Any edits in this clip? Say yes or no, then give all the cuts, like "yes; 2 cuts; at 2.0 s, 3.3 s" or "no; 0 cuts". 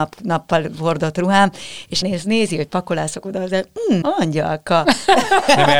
yes; 2 cuts; at 2.0 s, 4.0 s